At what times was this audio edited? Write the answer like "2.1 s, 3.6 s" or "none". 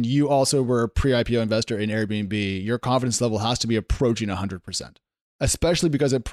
none